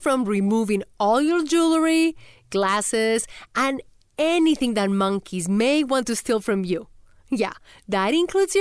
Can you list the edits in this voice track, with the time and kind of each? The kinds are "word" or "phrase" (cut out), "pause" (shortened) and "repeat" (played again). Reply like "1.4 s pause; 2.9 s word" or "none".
none